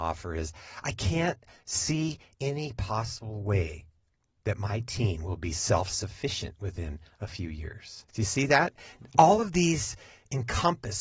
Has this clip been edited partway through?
yes; 1 cut; at 8.1 s

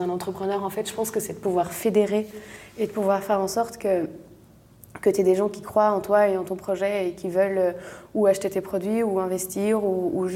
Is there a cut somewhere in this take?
no; 0 cuts

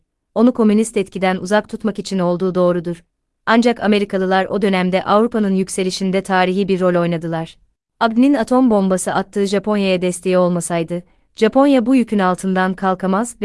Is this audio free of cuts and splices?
yes; 0 cuts

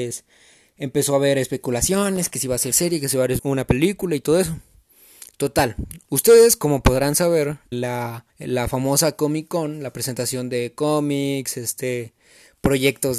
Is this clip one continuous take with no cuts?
no; 4 cuts; at 2.7 s, 3.4 s, 7.7 s, 8.3 s

